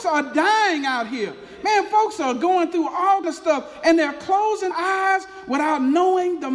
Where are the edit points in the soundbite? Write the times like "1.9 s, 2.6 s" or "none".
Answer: 3.2 s, 4.7 s